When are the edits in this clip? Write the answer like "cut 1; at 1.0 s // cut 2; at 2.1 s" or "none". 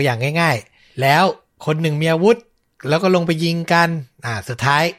none